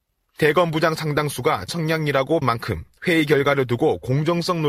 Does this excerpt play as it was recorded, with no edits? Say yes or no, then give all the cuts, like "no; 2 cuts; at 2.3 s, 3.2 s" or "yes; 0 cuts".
no; 2 cuts; at 1.7 s, 2.4 s